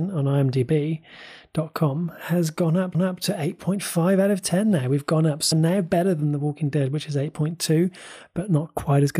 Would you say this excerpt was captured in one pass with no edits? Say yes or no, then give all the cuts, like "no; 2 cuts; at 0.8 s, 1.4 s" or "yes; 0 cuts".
no; 2 cuts; at 2.9 s, 5.5 s